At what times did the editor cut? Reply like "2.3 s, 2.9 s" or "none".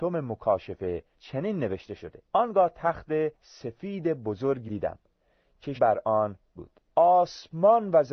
1.1 s, 2.3 s, 3.3 s, 4.7 s, 5.8 s, 6.6 s, 6.9 s